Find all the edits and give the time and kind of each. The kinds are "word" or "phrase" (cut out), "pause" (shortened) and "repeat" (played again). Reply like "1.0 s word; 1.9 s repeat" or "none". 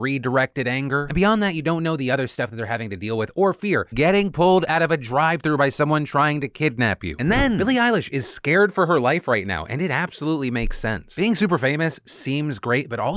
3.9 s word